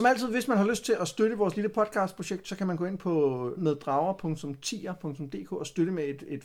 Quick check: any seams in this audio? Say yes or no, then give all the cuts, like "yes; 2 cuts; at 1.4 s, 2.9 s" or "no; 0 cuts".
yes; 1 cut; at 3.6 s